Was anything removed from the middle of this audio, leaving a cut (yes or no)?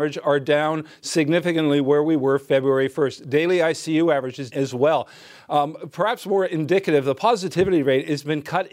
yes